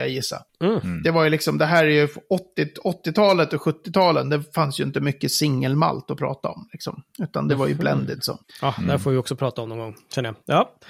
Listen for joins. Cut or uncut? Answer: cut